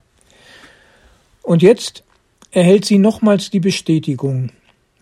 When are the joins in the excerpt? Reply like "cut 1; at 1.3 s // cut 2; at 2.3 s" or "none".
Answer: none